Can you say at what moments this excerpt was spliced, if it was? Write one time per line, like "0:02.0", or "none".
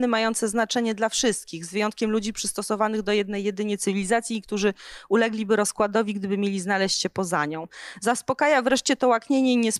none